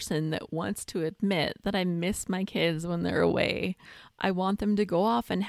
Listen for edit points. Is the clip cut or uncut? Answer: uncut